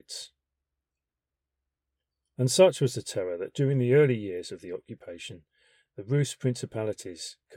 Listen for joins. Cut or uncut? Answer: uncut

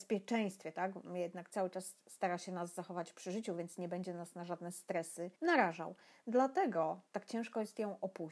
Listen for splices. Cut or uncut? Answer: cut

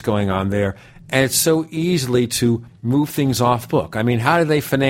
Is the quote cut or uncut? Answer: uncut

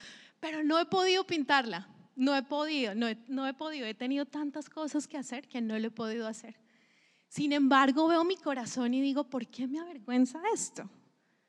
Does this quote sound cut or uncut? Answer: uncut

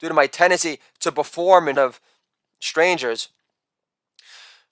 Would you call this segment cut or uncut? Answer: cut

